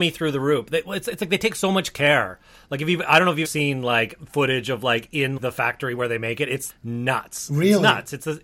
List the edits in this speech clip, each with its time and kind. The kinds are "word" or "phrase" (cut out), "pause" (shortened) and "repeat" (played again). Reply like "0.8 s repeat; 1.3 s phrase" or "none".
3.4 s word; 5.4 s word; 6.7 s word